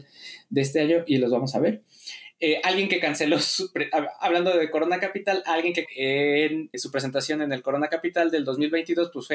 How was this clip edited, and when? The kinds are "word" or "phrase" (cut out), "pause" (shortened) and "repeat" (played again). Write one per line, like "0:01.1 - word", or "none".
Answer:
0:05.9 - word
0:06.7 - word